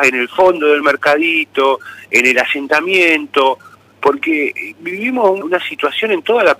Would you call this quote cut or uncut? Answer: cut